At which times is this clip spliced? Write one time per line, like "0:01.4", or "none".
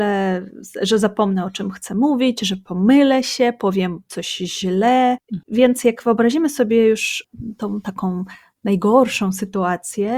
none